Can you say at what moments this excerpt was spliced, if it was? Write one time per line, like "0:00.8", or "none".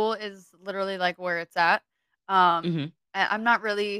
none